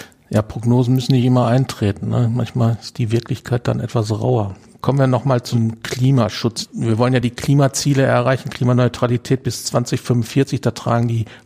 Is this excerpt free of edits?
yes; 0 cuts

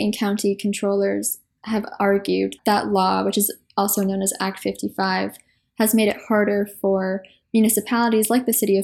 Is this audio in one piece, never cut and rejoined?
no; 1 cut; at 2.6 s

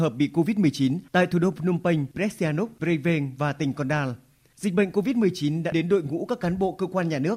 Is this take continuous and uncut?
no; 3 cuts; at 2.1 s, 2.8 s, 5.7 s

